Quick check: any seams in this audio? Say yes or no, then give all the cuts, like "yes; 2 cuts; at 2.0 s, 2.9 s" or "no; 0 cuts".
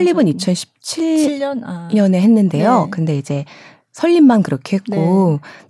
no; 0 cuts